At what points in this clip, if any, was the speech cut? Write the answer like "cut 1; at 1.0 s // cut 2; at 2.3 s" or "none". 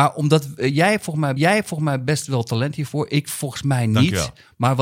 cut 1; at 1.4 s